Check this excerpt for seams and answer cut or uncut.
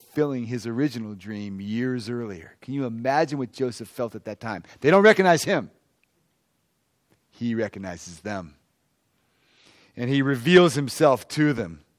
uncut